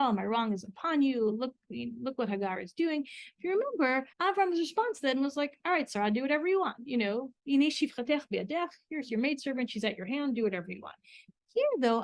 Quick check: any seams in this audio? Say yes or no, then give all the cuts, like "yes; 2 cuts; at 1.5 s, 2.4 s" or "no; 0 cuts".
yes; 1 cut; at 4.1 s